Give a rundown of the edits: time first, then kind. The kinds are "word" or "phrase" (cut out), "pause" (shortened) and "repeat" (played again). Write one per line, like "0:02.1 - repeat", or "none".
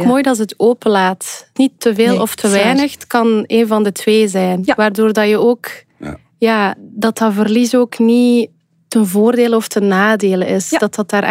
0:01.6 - word